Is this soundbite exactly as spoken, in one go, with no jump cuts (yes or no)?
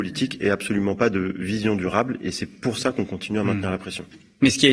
yes